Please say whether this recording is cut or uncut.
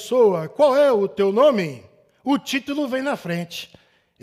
uncut